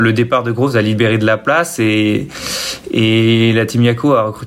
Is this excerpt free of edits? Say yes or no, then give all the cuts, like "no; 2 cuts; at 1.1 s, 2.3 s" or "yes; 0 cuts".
yes; 0 cuts